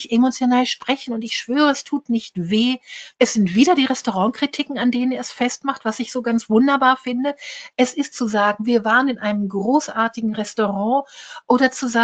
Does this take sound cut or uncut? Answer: cut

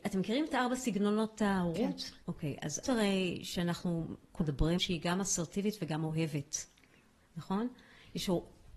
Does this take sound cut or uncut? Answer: cut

